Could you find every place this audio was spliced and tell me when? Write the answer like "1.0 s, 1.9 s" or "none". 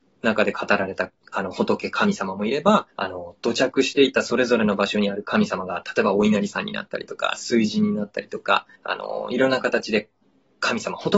2.9 s, 8.8 s